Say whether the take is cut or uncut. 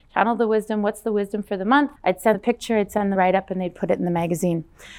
cut